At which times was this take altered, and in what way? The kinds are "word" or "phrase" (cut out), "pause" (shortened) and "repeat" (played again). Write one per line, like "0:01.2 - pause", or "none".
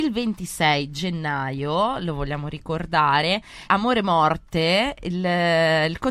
0:03.7 - word